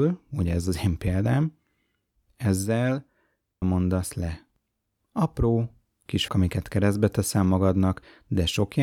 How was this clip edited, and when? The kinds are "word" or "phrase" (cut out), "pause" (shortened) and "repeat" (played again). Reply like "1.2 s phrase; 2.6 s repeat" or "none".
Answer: 3.6 s word; 6.3 s word